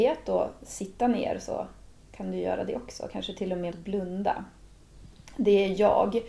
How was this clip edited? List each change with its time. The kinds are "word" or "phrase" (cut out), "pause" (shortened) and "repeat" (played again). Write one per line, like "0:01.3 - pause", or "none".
0:03.7 - word